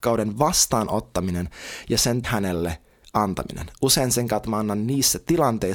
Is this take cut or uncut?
cut